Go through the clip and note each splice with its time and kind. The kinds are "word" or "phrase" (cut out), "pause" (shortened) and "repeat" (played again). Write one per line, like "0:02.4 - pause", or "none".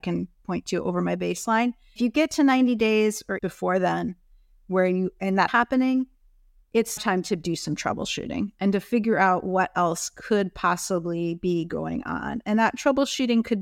0:02.0 - word
0:03.4 - word
0:05.5 - word
0:07.0 - word